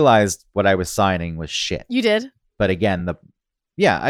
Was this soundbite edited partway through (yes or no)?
no